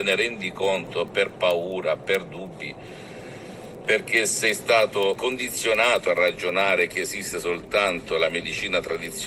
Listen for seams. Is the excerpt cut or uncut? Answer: cut